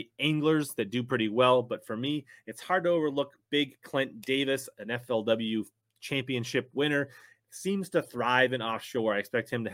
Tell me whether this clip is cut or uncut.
uncut